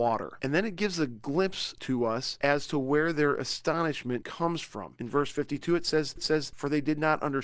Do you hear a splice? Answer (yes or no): yes